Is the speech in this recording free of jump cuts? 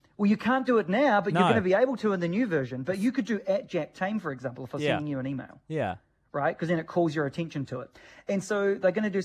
yes; 0 cuts

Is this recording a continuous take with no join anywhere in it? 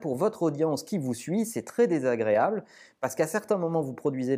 yes; 0 cuts

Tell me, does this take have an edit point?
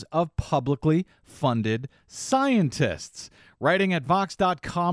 no; 0 cuts

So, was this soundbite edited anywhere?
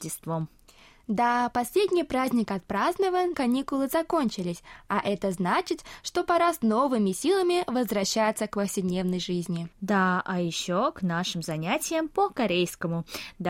yes; 2 cuts; at 3.3 s, 9.7 s

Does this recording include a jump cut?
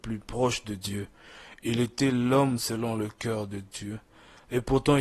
no; 0 cuts

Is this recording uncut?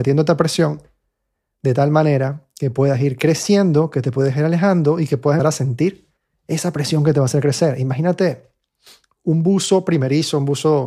no; 2 cuts; at 5.4 s, 6.2 s

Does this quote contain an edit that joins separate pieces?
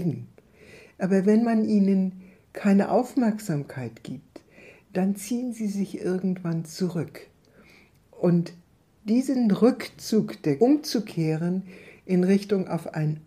yes; 1 cut; at 10.6 s

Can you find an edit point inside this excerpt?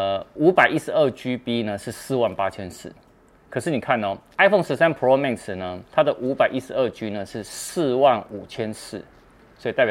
no; 0 cuts

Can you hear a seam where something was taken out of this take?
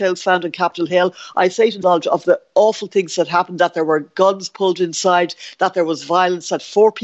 yes; 1 cut; at 1.8 s

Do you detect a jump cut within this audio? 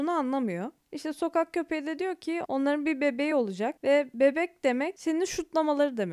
no; 0 cuts

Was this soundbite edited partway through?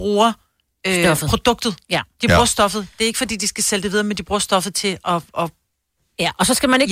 no; 0 cuts

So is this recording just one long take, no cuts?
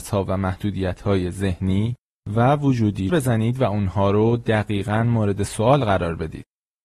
no; 1 cut; at 3.1 s

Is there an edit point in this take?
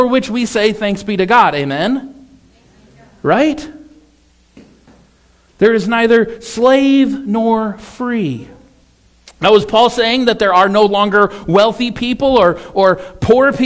no; 0 cuts

